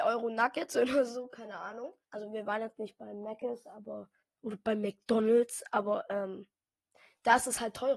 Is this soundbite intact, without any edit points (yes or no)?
no